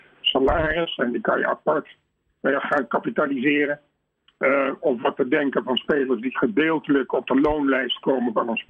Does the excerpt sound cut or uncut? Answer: uncut